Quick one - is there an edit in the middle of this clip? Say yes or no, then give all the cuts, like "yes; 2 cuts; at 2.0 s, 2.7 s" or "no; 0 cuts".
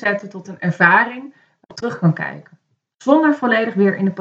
yes; 1 cut; at 1.7 s